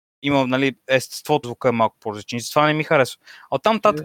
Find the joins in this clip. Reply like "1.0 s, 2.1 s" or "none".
1.4 s